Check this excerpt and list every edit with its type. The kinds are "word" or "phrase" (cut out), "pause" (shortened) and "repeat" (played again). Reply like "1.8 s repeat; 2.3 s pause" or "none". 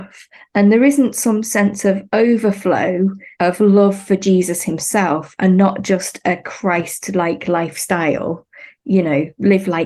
3.3 s pause